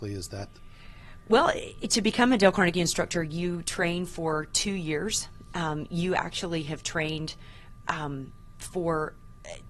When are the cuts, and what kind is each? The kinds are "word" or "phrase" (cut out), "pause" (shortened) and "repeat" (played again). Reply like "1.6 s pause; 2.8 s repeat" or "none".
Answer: none